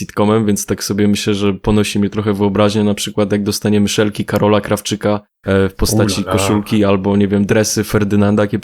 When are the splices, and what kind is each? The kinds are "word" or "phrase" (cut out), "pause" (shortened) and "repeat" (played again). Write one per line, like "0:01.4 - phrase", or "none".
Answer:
0:05.3 - pause